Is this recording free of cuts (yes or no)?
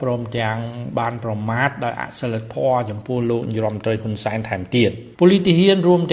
no